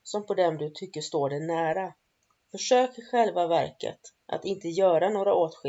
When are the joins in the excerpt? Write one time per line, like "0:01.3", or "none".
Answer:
0:02.2
0:04.2

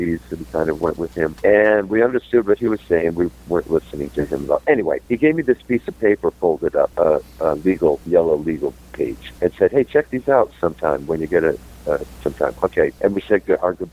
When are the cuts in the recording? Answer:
none

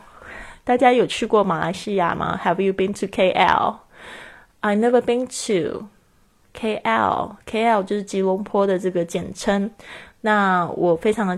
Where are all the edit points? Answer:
none

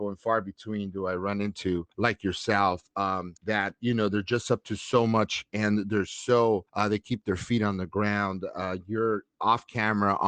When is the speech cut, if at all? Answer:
0:01.9
0:03.4
0:06.7

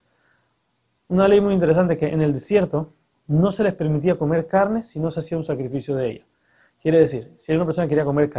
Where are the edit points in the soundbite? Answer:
none

